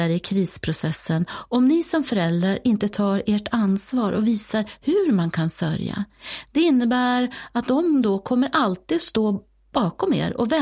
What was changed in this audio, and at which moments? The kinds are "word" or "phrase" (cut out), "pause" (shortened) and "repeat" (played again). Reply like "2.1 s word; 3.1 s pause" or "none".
none